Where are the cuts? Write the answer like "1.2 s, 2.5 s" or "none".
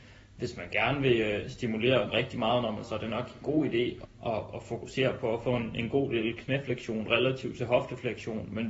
2.1 s, 2.8 s, 3.4 s, 4.0 s